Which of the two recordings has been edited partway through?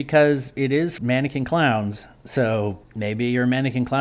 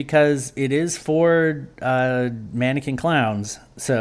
first; 2 cuts; at 1.0 s, 2.8 s

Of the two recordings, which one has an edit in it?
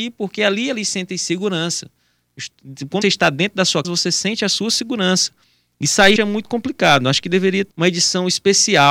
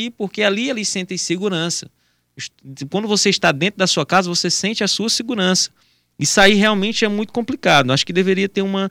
first; 4 cuts; at 3.0 s, 3.8 s, 6.2 s, 7.7 s

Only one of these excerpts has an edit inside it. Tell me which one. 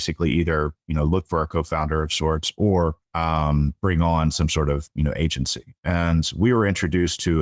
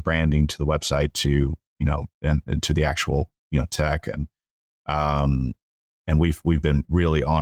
first; 1 cut; at 3.0 s

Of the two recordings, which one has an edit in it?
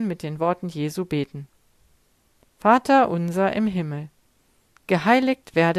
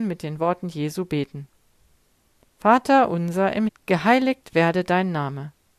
second; 1 cut; at 3.7 s

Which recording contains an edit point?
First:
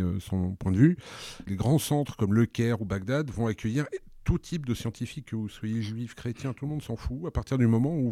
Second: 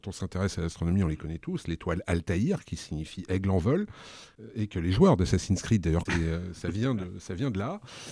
second; 1 cut; at 6.1 s

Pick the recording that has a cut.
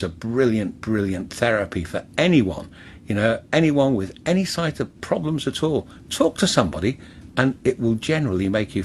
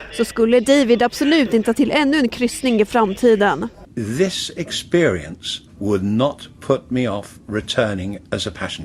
second; 2 cuts; at 1.7 s, 5.7 s

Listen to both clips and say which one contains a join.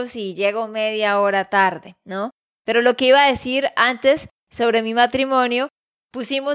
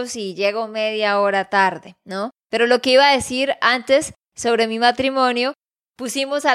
second; 1 cut; at 2.4 s

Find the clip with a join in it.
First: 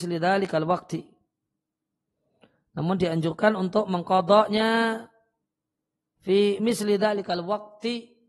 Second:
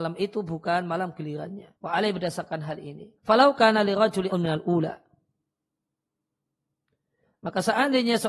second; 3 cuts; at 1.8 s, 3.2 s, 4.3 s

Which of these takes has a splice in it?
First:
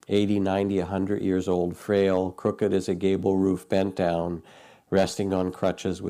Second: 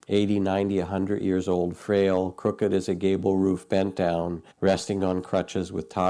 second; 1 cut; at 4.5 s

